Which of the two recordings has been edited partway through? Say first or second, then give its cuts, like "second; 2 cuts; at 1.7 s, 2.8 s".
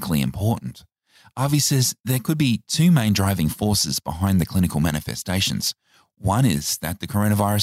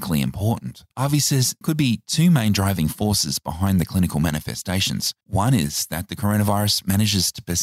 second; 3 cuts; at 0.9 s, 1.6 s, 5.2 s